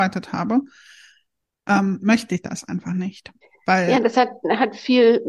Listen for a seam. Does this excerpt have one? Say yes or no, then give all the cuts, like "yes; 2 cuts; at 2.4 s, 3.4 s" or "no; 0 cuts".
yes; 1 cut; at 3.4 s